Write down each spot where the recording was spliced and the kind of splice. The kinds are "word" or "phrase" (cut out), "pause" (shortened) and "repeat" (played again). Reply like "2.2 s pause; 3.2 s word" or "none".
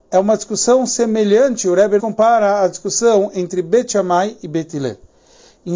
2.0 s word

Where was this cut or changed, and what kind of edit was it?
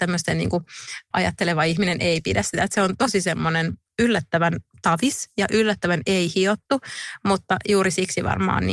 1.1 s word

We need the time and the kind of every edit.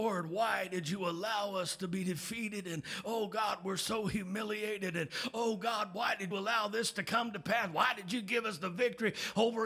6.3 s word

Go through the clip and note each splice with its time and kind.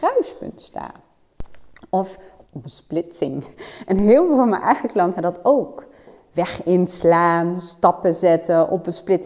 2.4 s word; 5.2 s word

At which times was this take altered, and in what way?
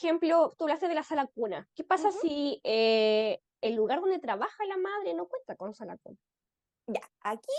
1.7 s pause

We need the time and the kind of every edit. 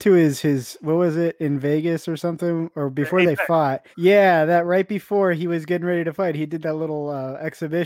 3.9 s pause; 6.6 s word

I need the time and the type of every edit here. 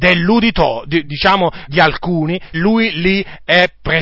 1.0 s word; 1.7 s word; 2.5 s phrase

